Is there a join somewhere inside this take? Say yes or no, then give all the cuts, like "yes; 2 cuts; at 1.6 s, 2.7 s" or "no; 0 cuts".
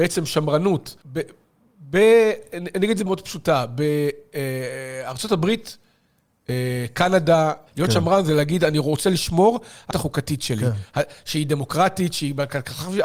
yes; 4 cuts; at 1.0 s, 3.1 s, 7.7 s, 9.9 s